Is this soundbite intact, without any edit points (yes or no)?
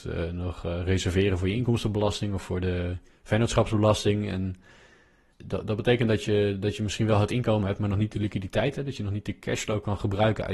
yes